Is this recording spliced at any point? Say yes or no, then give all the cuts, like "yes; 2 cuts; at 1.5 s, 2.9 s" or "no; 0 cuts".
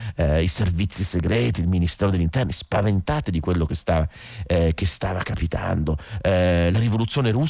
no; 0 cuts